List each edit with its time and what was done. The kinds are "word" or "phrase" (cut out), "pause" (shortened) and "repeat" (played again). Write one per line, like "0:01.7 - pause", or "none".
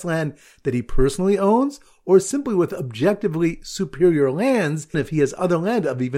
0:04.9 - word